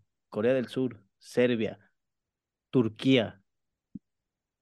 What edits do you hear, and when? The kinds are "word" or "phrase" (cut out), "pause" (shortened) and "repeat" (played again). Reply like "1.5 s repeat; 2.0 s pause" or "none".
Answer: none

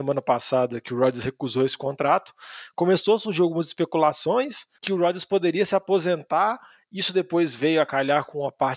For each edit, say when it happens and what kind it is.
4.7 s pause

